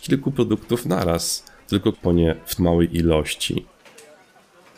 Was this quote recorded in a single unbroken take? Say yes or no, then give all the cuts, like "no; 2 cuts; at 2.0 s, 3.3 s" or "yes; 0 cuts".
no; 2 cuts; at 1.9 s, 2.6 s